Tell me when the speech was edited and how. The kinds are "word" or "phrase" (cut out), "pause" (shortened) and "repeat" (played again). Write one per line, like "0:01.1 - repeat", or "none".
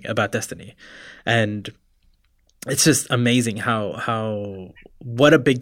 none